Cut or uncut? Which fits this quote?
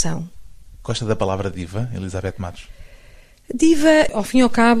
uncut